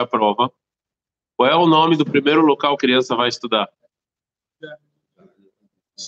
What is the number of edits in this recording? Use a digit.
1